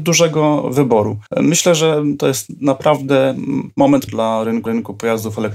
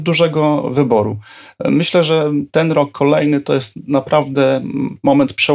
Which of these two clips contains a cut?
first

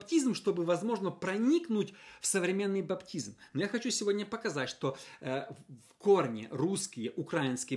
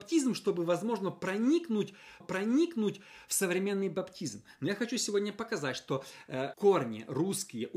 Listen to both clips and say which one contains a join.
second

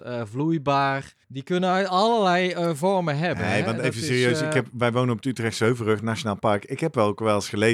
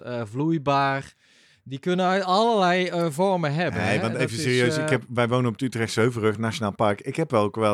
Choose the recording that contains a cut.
first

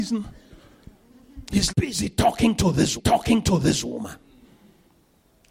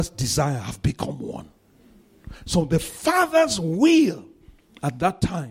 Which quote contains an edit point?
first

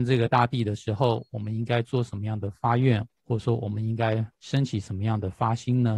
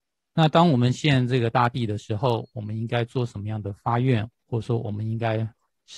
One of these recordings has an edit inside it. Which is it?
first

